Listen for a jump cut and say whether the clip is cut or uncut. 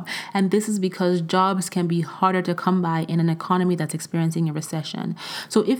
uncut